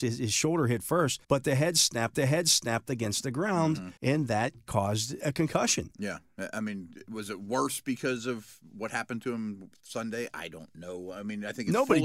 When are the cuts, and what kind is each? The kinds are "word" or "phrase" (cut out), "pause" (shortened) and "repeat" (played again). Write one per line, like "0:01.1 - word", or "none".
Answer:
0:01.2 - pause
0:02.1 - repeat
0:04.0 - pause
0:05.2 - word